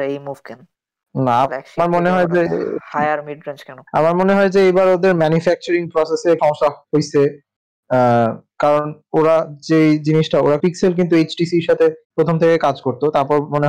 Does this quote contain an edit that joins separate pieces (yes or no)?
yes